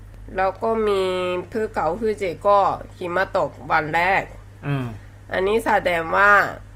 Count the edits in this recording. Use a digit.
1